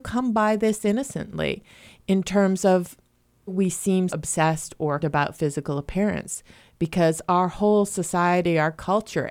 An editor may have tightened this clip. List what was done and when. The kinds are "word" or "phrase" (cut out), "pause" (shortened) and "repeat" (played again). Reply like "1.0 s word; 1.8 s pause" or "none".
3.5 s word; 4.1 s word; 5.0 s word